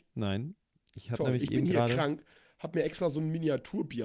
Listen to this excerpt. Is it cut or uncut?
uncut